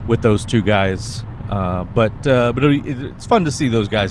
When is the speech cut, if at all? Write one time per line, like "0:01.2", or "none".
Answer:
none